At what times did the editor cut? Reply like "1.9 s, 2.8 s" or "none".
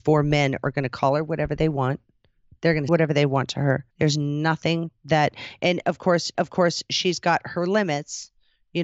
2.9 s, 3.9 s, 6.3 s

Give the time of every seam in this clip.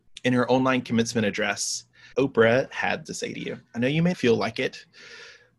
2.1 s, 3.1 s, 3.7 s, 4.1 s

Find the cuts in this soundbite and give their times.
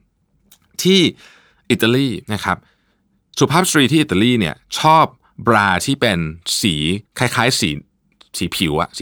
2.2 s, 7.1 s

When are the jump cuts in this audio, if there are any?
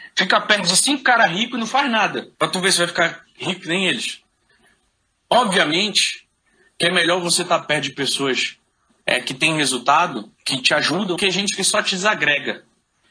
2.3 s, 10.3 s, 11.2 s

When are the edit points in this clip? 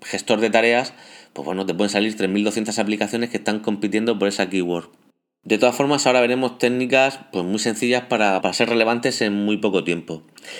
8.4 s

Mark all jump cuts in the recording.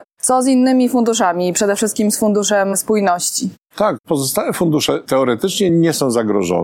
none

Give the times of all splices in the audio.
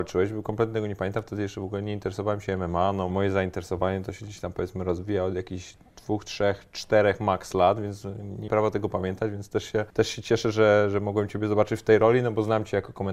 3.1 s, 8.5 s, 9.9 s

